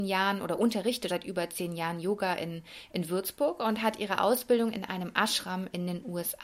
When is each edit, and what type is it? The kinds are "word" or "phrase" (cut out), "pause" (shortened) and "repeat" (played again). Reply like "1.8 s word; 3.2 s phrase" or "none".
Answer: 1.1 s word